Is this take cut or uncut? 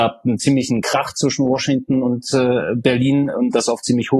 uncut